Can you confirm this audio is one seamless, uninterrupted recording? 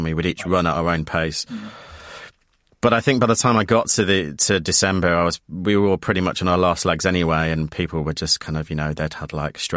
yes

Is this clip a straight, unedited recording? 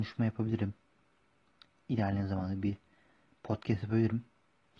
yes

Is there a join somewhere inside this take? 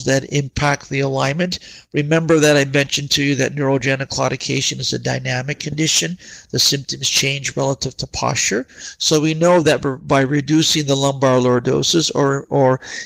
no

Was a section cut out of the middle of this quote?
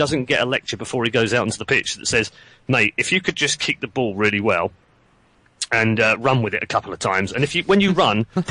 no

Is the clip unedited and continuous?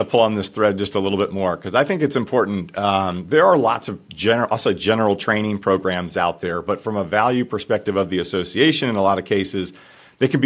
yes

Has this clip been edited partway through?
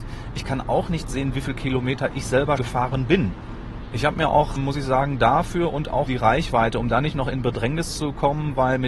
yes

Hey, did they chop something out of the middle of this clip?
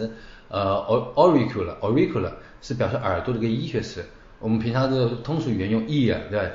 no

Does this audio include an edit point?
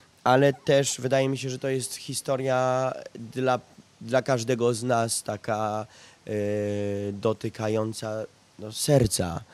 no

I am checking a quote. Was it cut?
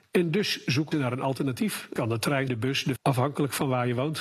yes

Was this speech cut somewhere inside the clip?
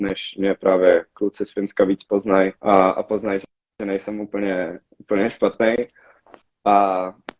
yes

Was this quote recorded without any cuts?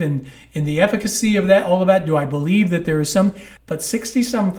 no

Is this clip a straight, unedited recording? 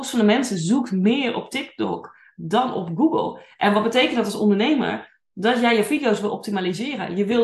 yes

